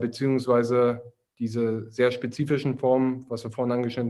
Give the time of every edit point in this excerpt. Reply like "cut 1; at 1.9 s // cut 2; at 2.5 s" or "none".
none